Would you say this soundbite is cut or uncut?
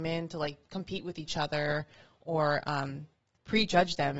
uncut